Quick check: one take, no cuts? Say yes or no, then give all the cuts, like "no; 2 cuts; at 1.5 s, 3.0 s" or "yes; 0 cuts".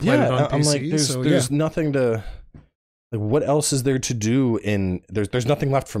yes; 0 cuts